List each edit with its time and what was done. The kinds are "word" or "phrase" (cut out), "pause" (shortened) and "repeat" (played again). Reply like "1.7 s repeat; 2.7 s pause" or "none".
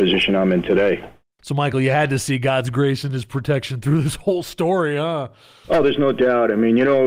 none